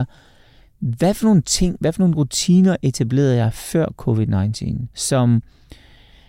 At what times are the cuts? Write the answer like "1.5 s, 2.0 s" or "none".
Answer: 4.9 s